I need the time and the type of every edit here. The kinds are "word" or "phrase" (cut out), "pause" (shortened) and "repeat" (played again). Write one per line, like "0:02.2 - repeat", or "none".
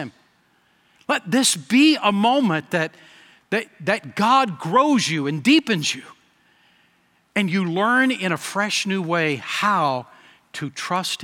none